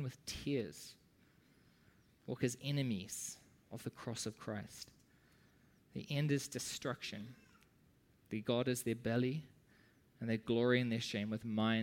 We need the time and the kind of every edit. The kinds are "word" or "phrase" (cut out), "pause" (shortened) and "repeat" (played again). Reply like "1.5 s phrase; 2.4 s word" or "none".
none